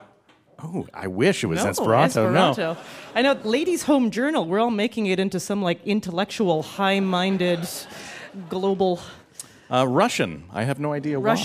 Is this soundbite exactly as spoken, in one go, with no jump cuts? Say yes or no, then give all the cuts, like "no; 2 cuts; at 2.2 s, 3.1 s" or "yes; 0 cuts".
yes; 0 cuts